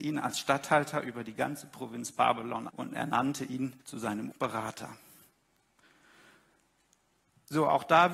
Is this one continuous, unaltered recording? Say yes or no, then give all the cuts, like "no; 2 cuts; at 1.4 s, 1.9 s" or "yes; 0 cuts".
no; 3 cuts; at 2.7 s, 3.8 s, 4.3 s